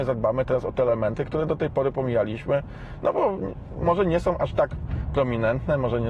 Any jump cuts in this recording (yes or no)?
no